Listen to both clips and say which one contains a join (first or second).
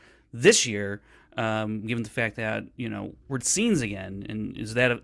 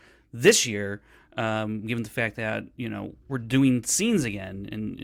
first